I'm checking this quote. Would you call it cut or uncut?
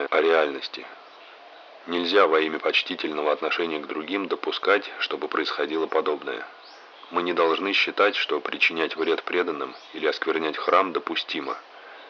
uncut